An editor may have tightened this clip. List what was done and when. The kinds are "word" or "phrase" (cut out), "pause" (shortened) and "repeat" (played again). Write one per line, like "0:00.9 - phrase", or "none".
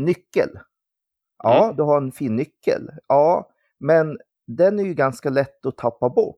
none